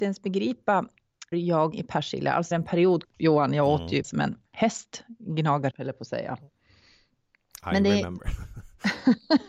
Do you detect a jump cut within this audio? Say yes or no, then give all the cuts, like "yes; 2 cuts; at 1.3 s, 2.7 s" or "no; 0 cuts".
yes; 7 cuts; at 1.3 s, 1.7 s, 2.5 s, 3.0 s, 4.0 s, 4.5 s, 5.7 s